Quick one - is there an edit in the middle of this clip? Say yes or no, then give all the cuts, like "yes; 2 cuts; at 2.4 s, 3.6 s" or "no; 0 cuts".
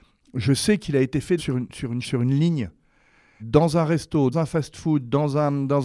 yes; 4 cuts; at 1.4 s, 2.0 s, 3.4 s, 4.3 s